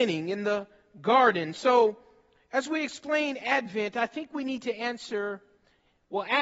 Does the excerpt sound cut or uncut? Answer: uncut